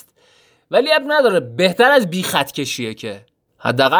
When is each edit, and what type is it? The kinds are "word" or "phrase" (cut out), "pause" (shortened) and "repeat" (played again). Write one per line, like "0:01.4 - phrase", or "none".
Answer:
none